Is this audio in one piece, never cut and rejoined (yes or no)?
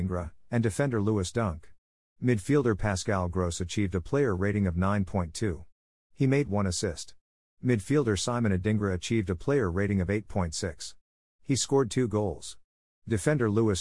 yes